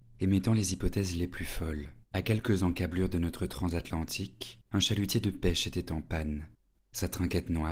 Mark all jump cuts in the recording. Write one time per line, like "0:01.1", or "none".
0:02.0
0:04.7